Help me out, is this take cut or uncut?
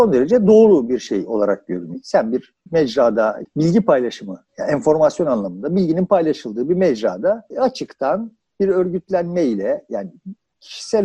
cut